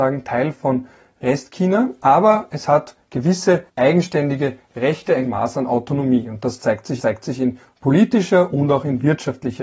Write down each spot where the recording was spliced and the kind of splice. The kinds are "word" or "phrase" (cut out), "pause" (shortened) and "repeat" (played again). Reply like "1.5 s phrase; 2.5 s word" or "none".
3.7 s pause; 5.2 s word; 7.0 s repeat